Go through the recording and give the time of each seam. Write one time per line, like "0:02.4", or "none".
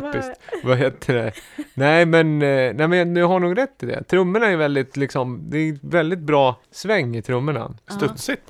0:06.6